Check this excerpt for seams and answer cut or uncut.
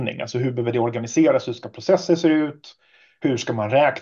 uncut